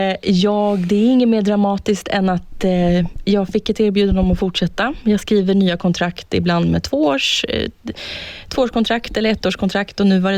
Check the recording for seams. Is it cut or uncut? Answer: uncut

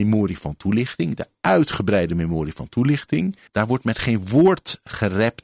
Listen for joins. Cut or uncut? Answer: cut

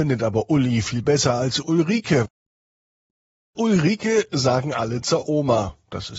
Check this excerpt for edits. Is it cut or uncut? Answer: uncut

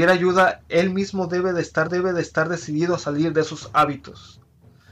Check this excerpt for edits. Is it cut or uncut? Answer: cut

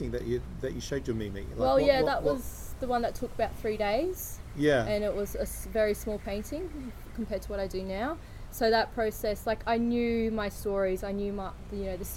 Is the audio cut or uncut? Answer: uncut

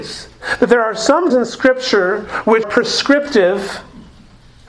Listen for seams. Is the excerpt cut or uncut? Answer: cut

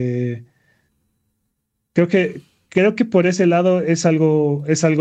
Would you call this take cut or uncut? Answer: uncut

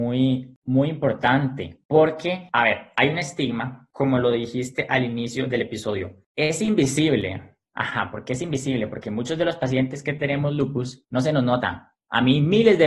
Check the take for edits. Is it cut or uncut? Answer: uncut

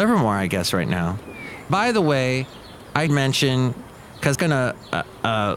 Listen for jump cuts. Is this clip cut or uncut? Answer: cut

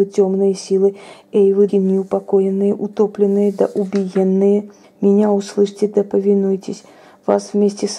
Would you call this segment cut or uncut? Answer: cut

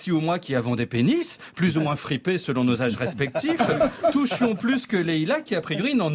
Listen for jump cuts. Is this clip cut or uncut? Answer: uncut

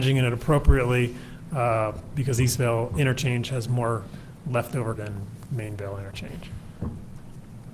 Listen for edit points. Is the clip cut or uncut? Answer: cut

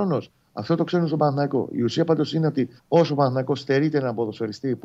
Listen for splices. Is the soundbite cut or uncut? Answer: cut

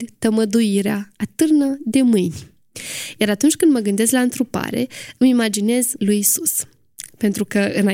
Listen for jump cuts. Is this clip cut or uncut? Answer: cut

